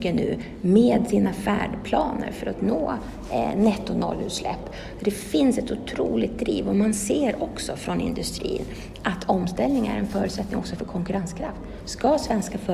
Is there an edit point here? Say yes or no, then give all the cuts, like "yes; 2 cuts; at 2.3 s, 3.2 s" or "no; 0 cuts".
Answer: no; 0 cuts